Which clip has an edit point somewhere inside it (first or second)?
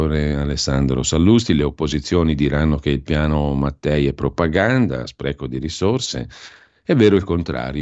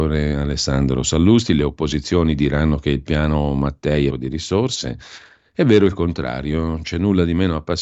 second